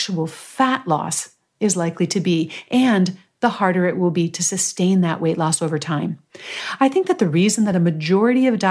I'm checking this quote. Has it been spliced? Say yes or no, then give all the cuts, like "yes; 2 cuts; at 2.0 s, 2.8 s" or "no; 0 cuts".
no; 0 cuts